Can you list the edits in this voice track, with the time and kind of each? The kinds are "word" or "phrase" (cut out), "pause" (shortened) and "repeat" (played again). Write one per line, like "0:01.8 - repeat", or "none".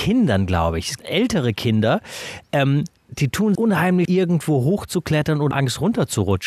0:01.0 - word
0:03.0 - pause
0:03.5 - word
0:04.0 - word
0:05.5 - word